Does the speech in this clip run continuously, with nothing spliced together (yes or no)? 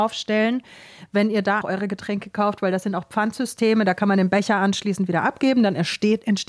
no